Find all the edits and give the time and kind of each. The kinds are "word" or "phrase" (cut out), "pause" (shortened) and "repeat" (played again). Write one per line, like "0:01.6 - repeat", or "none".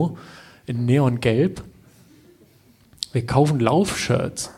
none